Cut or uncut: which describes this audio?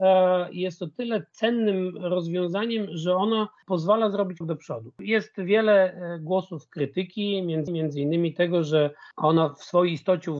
cut